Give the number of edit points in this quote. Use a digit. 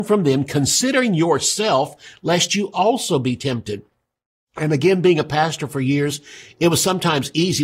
0